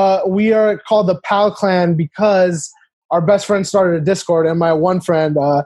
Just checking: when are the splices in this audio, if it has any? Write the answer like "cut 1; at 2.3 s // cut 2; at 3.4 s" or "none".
none